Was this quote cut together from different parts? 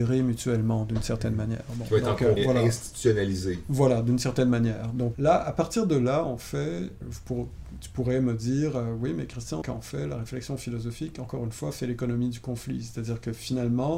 yes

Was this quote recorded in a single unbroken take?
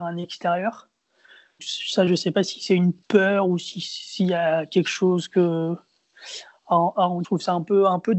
no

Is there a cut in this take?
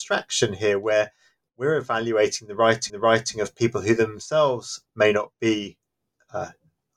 yes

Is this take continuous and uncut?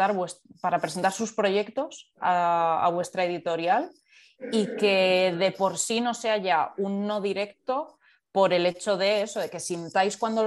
yes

